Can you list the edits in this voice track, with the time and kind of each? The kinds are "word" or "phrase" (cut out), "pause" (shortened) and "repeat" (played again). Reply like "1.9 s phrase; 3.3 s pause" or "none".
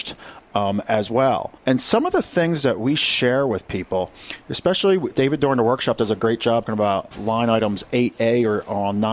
1.6 s pause; 5.1 s word; 6.6 s word; 7.1 s phrase

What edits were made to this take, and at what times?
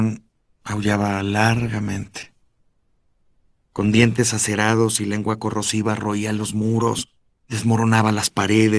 none

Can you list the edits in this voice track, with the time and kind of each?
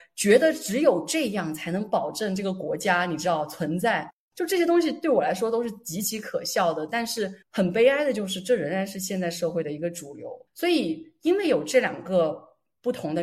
7.4 s pause; 10.5 s pause

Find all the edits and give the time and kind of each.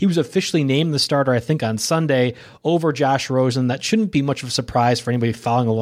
none

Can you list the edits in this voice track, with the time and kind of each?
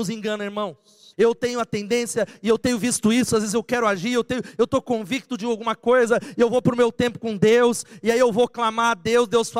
1.1 s pause

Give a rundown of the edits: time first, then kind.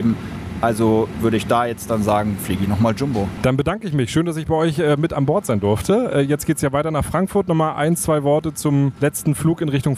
none

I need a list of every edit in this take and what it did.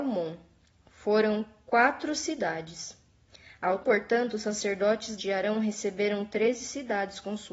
3.8 s word; 5.2 s word

